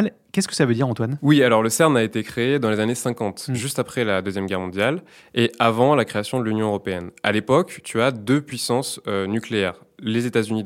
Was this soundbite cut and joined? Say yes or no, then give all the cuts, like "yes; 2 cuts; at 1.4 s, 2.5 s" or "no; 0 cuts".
no; 0 cuts